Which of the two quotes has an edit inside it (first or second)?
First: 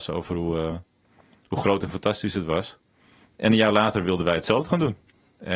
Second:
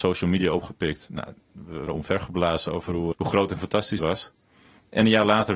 second